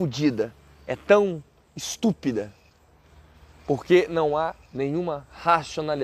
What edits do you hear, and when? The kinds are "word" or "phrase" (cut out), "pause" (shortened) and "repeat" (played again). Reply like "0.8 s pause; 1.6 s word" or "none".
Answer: none